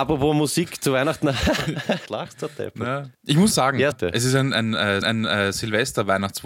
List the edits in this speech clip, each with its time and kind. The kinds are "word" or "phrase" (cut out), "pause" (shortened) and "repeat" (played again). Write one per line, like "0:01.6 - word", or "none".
0:02.1 - word
0:03.1 - pause
0:03.5 - word
0:03.9 - phrase
0:05.0 - repeat